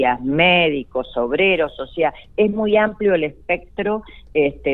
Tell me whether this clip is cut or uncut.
uncut